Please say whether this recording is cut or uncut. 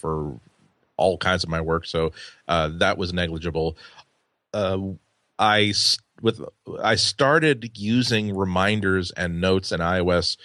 uncut